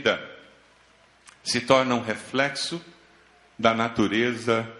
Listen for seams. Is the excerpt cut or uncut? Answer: uncut